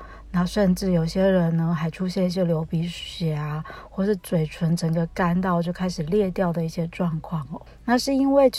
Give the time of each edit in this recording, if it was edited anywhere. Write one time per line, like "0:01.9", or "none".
0:07.7